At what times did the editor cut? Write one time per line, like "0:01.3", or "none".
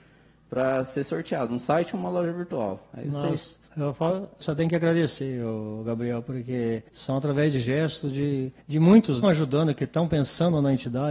0:03.7
0:04.4
0:06.9
0:07.6
0:08.6
0:09.2

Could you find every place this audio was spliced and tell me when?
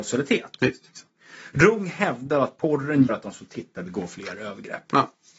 0:03.1

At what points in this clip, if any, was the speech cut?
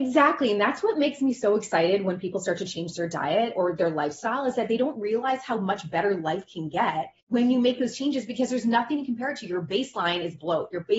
0:07.2

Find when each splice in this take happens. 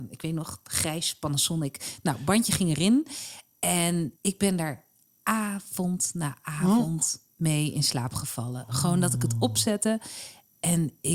0:04.2

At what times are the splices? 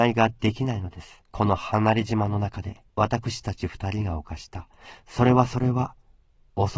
0:01.3
0:02.9

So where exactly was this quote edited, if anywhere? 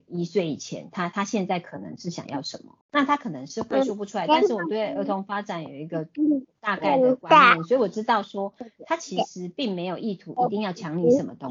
0:02.8

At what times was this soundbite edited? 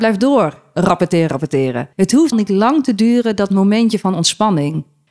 0:01.3
0:01.9
0:02.3

